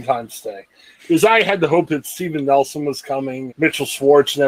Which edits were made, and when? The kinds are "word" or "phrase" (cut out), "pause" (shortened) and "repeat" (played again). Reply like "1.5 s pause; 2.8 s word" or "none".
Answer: 3.5 s word